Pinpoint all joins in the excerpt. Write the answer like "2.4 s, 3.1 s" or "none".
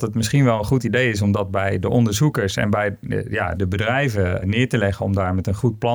3.6 s, 4.4 s

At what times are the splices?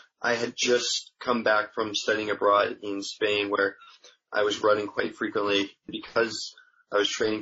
none

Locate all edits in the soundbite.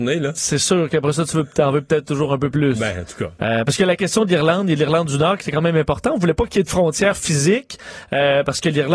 none

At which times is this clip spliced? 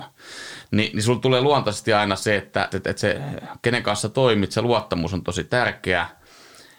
2.7 s

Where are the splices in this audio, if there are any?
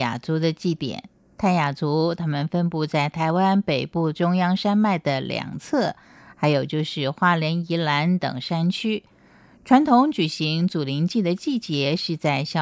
none

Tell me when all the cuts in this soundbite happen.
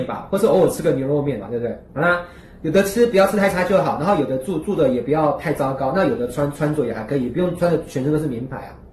1.9 s

